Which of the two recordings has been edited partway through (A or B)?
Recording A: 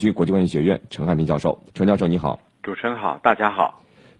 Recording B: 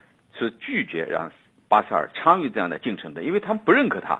A